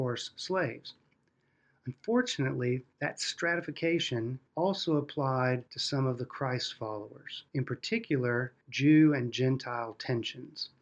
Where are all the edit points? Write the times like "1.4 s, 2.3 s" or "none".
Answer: 2.9 s, 4.5 s, 5.7 s, 7.5 s, 8.6 s